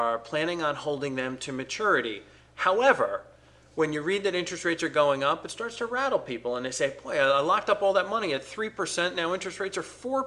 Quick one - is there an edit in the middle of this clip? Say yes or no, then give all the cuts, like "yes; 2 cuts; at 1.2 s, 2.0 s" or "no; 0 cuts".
no; 0 cuts